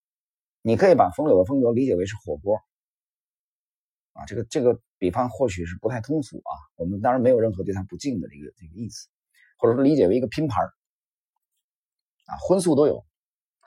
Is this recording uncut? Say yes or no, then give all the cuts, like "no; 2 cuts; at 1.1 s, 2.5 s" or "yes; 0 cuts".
yes; 0 cuts